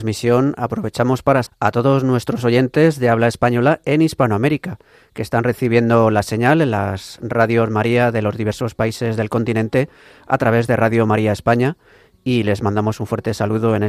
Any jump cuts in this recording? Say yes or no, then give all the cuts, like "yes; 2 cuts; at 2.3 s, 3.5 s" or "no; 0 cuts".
yes; 1 cut; at 1.5 s